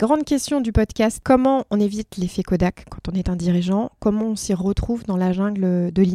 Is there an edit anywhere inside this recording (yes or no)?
no